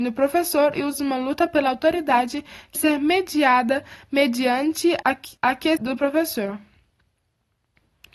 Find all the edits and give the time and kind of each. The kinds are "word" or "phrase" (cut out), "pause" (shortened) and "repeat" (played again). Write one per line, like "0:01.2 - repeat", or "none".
0:00.9 - word
0:02.8 - word
0:05.0 - word
0:05.4 - pause
0:05.8 - phrase